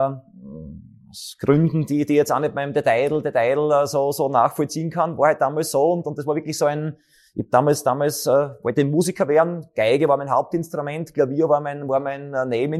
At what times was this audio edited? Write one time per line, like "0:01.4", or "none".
none